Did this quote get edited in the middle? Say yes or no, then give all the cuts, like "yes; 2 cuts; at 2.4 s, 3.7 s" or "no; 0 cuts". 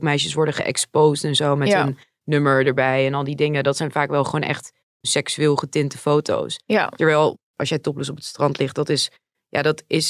no; 0 cuts